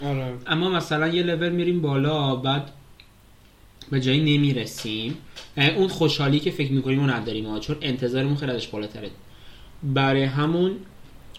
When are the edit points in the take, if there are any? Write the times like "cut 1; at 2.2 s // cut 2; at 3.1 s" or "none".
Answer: none